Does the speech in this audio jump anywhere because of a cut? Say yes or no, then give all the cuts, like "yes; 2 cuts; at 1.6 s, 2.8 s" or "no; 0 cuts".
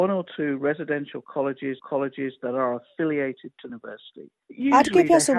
yes; 2 cuts; at 1.8 s, 3.7 s